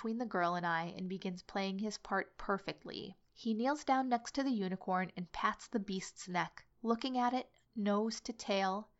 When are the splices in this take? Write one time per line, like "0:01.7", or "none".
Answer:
0:03.3
0:06.7